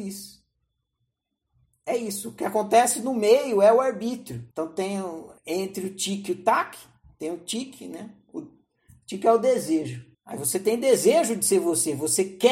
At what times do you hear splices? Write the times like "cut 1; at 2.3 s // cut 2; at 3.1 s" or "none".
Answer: cut 1; at 4.5 s // cut 2; at 5.4 s // cut 3; at 10.1 s